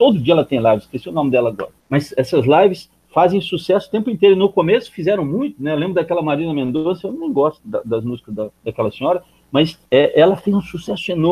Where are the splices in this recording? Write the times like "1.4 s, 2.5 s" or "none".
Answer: 1.8 s, 8.6 s, 9.9 s